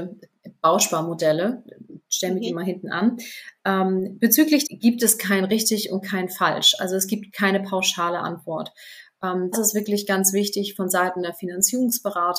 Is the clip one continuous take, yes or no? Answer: no